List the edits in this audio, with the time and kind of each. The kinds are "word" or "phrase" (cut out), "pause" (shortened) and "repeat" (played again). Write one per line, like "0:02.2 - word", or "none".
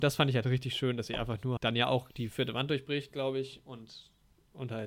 0:01.6 - word